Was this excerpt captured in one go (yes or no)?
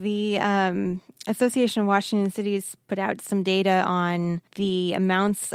no